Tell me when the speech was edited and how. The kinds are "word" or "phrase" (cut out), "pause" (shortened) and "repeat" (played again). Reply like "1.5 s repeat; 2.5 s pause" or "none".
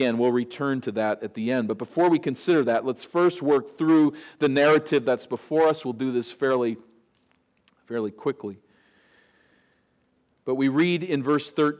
none